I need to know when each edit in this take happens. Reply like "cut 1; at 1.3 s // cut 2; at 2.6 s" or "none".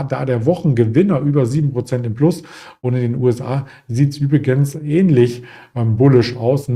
none